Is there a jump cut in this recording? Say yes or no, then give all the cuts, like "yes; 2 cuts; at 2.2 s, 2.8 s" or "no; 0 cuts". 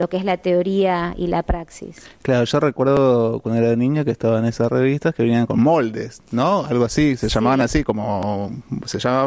no; 0 cuts